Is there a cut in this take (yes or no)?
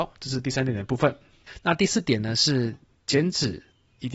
no